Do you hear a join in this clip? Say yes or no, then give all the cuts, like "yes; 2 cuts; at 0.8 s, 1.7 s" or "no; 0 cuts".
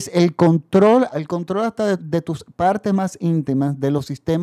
yes; 2 cuts; at 1.1 s, 2.0 s